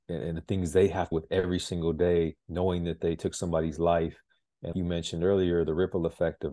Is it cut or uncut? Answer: cut